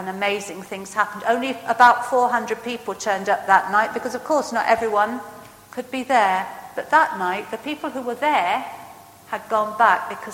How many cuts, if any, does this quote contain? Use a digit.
0